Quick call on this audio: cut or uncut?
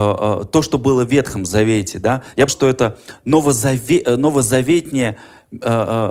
cut